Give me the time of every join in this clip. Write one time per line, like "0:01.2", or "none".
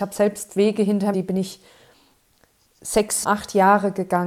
0:01.1
0:03.2